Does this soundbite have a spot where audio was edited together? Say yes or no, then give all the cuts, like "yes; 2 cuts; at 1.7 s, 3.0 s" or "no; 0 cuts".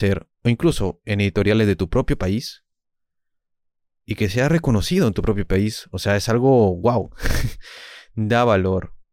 no; 0 cuts